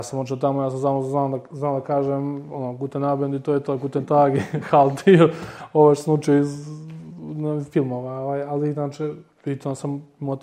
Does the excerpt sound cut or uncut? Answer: uncut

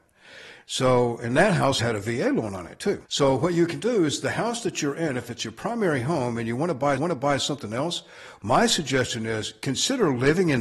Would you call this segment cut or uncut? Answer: cut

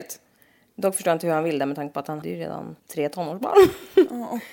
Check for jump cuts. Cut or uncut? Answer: cut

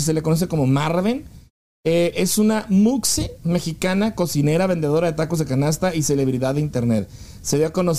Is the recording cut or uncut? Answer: uncut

